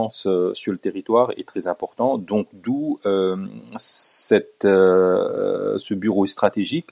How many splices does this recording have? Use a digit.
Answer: 0